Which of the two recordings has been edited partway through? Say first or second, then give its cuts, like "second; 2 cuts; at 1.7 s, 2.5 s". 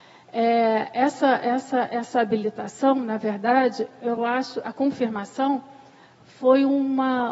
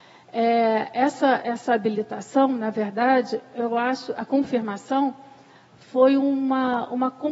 second; 1 cut; at 1.4 s